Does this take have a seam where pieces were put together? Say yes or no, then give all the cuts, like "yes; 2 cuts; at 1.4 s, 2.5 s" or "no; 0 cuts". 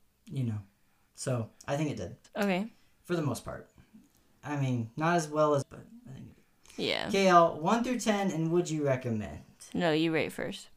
yes; 2 cuts; at 2.2 s, 5.6 s